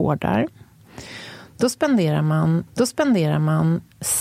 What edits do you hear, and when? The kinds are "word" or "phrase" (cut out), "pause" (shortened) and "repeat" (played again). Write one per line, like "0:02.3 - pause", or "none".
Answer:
0:02.7 - repeat